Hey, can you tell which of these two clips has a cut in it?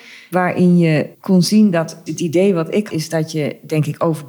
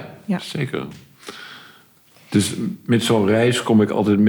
first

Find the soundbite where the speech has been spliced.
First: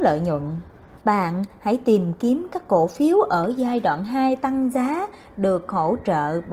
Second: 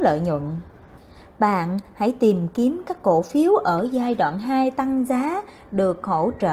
first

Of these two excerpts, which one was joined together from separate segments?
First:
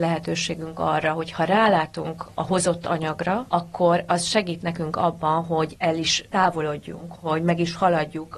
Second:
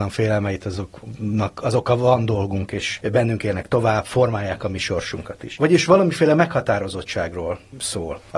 first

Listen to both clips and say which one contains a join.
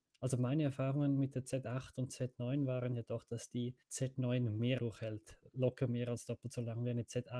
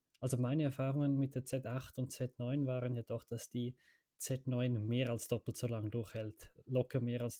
first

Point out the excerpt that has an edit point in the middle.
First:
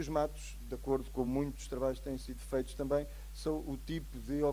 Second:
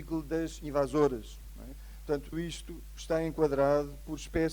second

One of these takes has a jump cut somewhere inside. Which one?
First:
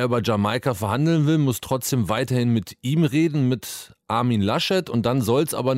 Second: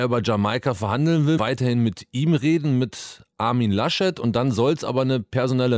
second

